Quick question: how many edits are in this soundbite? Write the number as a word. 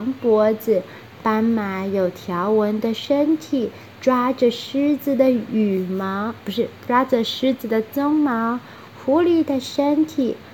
one